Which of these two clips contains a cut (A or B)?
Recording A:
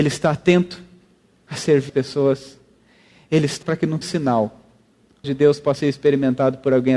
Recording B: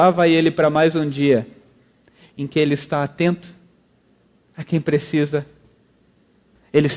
A